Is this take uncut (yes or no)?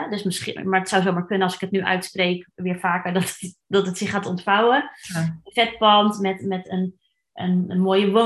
yes